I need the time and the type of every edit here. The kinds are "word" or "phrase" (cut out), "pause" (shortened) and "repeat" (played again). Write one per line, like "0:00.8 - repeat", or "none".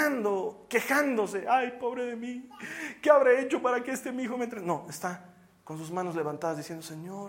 none